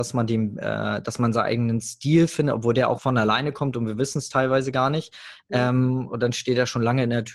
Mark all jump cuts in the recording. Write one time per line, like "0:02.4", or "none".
0:03.0